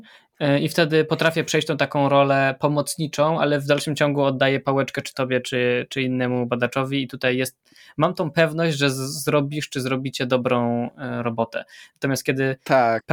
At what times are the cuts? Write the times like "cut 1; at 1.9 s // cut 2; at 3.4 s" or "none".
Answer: none